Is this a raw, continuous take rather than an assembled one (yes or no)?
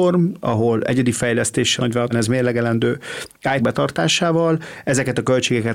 no